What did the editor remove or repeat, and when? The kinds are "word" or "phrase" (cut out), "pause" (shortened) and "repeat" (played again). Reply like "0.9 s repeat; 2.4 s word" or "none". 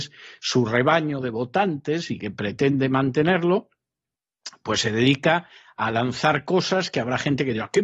none